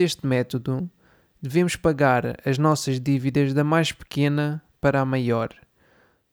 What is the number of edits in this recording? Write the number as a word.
zero